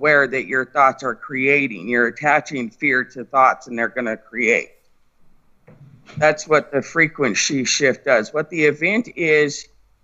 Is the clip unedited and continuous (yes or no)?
yes